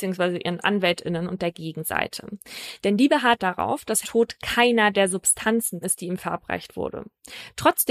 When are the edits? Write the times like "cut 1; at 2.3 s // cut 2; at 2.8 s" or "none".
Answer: cut 1; at 3.4 s // cut 2; at 4.0 s // cut 3; at 5.8 s